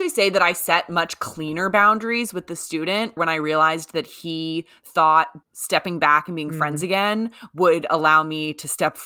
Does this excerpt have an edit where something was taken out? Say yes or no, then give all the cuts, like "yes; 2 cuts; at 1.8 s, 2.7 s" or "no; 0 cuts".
yes; 2 cuts; at 3.2 s, 5.4 s